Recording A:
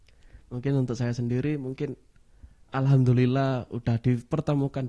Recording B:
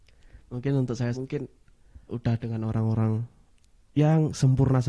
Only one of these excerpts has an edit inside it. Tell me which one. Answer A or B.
B